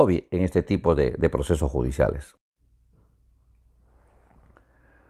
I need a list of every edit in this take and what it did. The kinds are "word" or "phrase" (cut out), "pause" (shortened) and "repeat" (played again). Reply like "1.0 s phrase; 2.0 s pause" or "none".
none